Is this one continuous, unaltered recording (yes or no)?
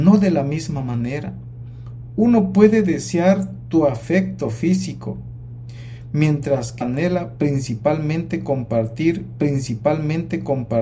no